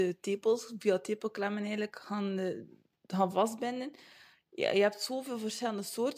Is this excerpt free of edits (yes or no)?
yes